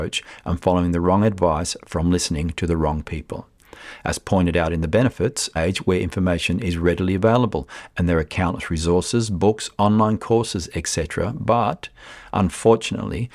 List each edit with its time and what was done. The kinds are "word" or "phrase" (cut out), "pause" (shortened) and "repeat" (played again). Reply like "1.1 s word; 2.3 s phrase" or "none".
5.6 s phrase